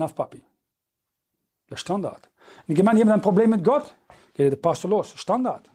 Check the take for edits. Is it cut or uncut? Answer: uncut